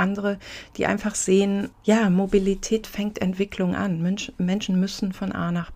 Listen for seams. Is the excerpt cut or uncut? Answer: cut